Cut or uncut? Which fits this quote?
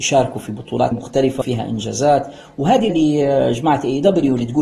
cut